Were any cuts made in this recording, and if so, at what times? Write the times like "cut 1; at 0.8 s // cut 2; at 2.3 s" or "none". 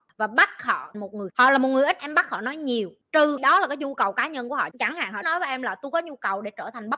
cut 1; at 0.9 s // cut 2; at 1.3 s // cut 3; at 2.0 s // cut 4; at 3.4 s // cut 5; at 4.7 s // cut 6; at 5.2 s